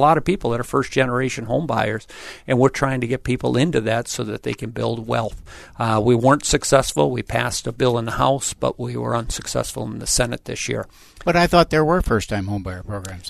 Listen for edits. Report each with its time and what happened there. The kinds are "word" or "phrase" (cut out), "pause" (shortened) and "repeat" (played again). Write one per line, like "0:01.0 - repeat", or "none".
none